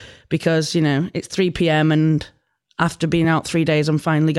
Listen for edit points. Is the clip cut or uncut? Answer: uncut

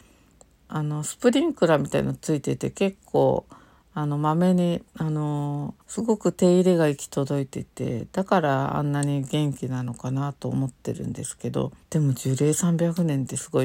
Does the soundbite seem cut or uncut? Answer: cut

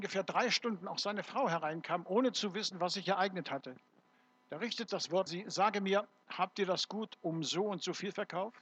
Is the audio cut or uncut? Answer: cut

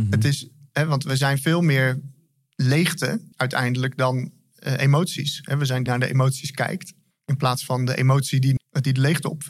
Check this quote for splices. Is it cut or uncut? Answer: cut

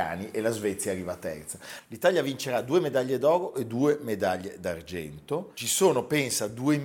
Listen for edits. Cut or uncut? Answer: uncut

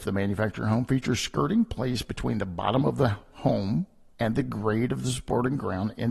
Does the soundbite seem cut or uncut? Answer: uncut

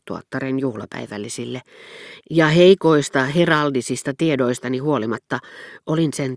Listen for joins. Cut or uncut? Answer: uncut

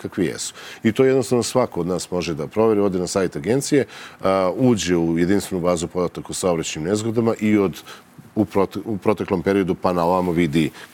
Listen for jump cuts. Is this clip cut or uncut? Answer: uncut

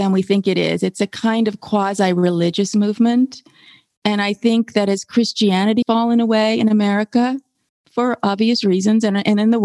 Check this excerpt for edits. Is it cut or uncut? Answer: cut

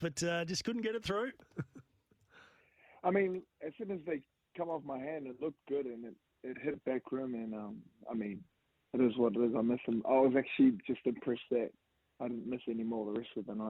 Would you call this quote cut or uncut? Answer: uncut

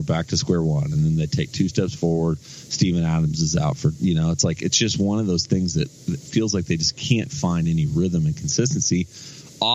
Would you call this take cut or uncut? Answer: uncut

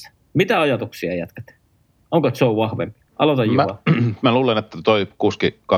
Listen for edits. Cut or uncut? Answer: cut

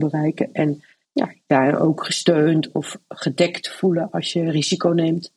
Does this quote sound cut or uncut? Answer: cut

